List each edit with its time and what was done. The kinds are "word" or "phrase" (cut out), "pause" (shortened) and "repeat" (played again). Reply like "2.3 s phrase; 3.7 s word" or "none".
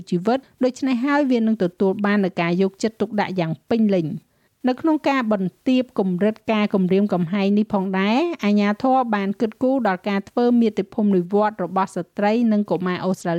4.3 s pause